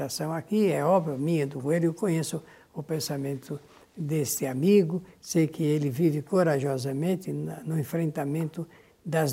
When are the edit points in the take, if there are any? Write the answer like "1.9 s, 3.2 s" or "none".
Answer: none